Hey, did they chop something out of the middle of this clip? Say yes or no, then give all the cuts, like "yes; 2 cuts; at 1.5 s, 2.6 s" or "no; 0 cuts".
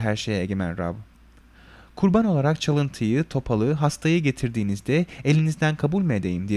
no; 0 cuts